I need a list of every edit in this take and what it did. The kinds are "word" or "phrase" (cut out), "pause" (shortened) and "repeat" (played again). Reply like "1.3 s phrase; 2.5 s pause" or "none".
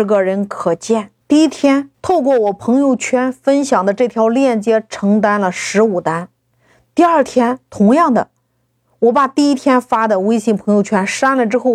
1.2 s pause; 1.9 s pause; 6.5 s pause